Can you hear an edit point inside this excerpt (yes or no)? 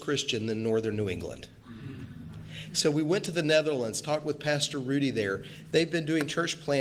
no